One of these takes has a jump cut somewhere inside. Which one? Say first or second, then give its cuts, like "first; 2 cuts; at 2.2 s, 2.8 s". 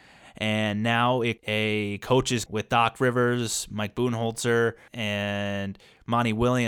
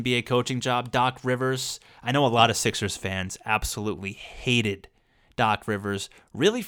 first; 3 cuts; at 1.4 s, 2.5 s, 4.9 s